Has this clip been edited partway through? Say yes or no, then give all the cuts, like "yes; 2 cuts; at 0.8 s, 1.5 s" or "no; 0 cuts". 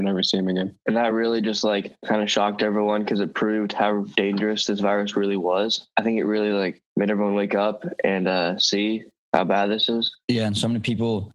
no; 0 cuts